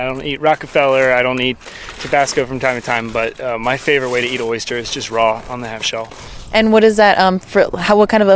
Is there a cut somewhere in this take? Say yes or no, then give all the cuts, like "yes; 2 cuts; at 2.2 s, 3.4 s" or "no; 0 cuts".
no; 0 cuts